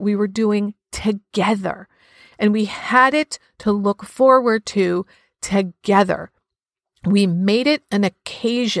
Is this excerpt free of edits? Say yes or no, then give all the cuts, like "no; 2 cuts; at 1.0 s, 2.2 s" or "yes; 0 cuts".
yes; 0 cuts